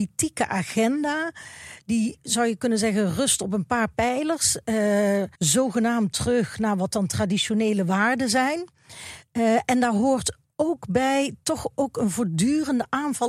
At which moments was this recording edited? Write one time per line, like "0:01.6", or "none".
0:05.3